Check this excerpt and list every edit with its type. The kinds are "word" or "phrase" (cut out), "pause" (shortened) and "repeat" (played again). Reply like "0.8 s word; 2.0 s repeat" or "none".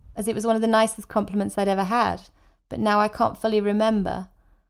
none